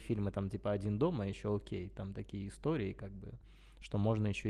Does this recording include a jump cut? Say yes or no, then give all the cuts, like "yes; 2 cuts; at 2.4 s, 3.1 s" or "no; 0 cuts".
no; 0 cuts